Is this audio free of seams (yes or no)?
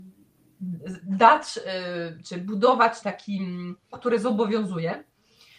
no